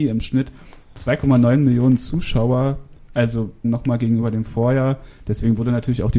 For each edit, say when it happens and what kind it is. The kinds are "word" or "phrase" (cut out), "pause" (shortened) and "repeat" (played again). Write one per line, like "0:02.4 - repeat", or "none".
0:03.6 - phrase